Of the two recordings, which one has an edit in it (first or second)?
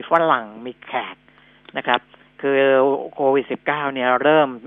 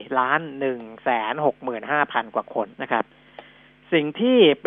second